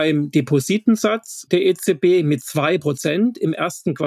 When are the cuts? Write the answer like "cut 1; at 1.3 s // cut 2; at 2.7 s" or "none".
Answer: none